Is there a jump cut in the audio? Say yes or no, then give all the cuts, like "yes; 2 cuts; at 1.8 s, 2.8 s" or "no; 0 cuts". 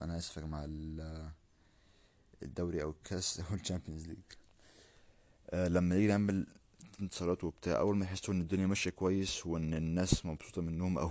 yes; 1 cut; at 7.0 s